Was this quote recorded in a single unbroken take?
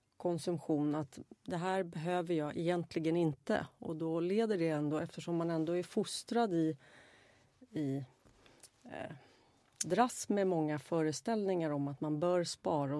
yes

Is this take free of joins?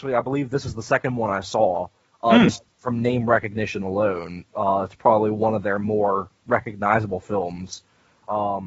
yes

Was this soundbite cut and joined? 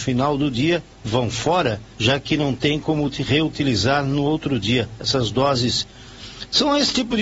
yes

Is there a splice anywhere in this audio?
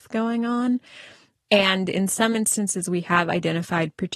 no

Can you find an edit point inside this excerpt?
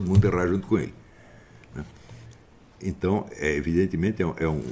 no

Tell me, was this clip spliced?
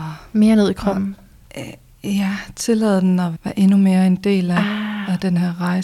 yes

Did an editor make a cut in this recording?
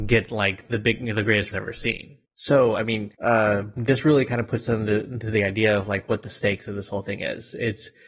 yes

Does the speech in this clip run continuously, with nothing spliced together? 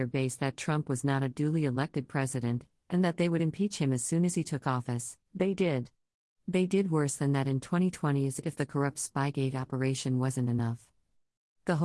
no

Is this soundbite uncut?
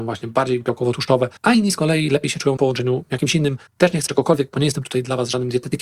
no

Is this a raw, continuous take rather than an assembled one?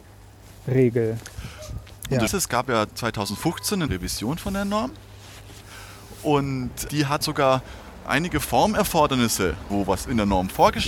no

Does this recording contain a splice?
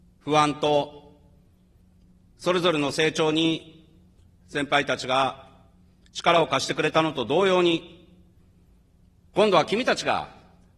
no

